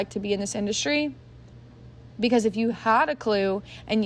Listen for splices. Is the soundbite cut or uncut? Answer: uncut